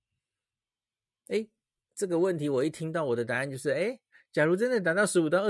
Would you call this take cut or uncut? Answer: uncut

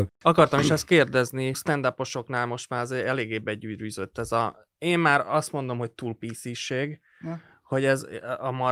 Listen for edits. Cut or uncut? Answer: cut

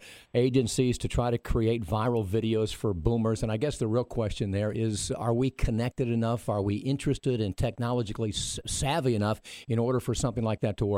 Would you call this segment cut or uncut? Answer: cut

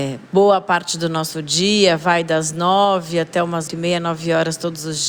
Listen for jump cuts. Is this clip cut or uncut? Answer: cut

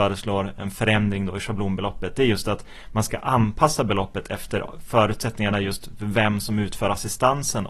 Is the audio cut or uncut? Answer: uncut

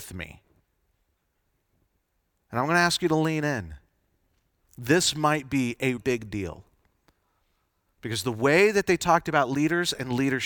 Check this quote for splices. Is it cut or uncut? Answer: cut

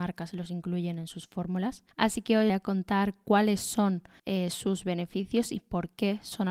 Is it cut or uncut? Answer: cut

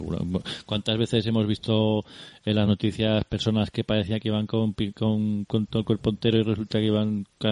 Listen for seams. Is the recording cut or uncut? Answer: uncut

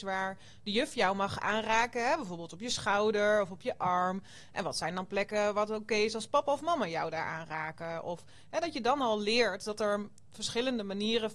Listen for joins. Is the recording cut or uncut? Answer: uncut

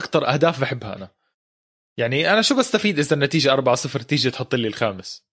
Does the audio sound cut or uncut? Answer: uncut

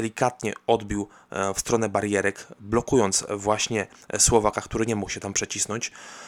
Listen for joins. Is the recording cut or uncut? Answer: uncut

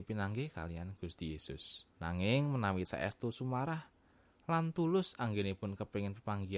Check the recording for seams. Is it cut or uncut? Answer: cut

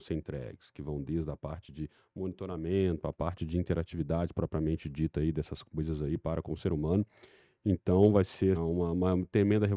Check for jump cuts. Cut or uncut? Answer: cut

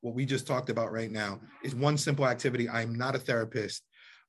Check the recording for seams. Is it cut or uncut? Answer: cut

